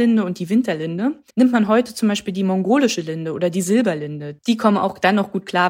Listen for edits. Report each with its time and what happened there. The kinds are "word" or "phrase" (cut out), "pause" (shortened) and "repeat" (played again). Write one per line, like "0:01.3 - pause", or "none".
0:01.3 - pause